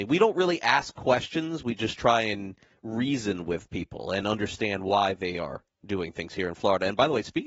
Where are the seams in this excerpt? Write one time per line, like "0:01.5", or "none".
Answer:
none